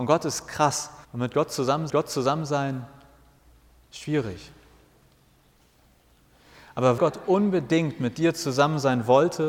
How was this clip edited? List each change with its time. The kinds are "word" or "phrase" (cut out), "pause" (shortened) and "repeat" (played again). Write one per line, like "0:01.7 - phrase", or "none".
0:01.0 - pause
0:01.9 - repeat
0:07.0 - word